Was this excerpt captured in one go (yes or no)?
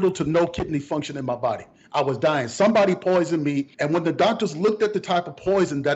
no